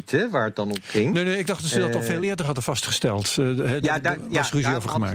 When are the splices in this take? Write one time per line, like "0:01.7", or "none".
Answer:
none